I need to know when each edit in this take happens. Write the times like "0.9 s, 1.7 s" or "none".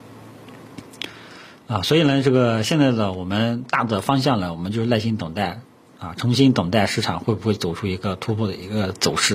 none